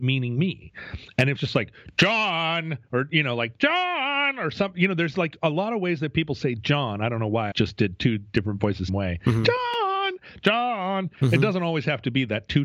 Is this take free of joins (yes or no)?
no